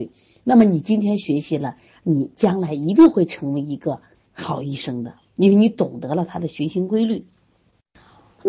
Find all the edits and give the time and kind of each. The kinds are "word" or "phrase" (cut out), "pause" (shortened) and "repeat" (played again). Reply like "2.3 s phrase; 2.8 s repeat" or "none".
4.1 s pause

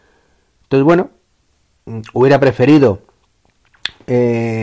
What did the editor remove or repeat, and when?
none

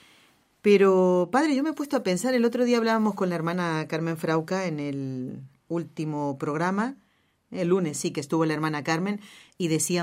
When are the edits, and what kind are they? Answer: none

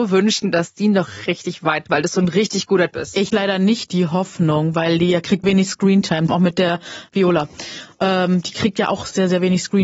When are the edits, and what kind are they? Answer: 1.3 s word; 1.9 s word; 2.9 s word; 3.3 s word; 5.4 s word; 6.3 s word

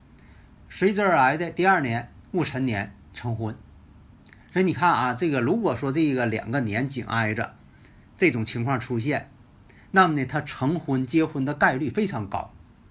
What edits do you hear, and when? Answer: none

